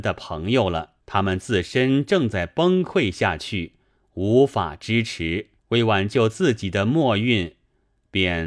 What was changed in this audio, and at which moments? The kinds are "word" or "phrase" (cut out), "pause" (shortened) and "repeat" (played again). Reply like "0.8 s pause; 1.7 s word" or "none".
1.0 s pause; 5.6 s pause